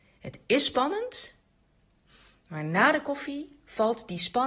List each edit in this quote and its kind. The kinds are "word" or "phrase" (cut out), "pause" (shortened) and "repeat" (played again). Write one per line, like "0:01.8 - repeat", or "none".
none